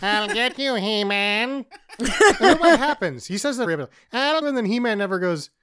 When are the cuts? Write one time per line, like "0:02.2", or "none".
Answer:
0:03.7
0:04.4